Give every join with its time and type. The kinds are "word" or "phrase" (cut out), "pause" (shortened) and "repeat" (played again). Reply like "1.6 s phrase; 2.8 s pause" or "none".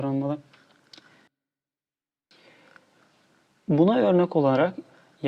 none